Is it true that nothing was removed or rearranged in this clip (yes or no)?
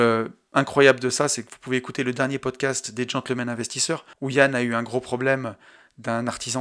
no